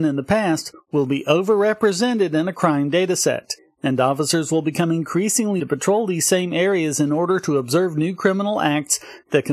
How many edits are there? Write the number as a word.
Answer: one